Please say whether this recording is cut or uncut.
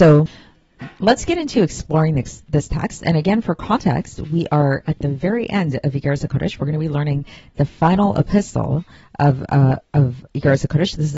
uncut